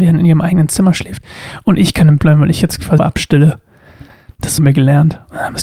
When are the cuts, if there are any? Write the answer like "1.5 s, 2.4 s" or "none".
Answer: 2.2 s, 3.0 s, 4.6 s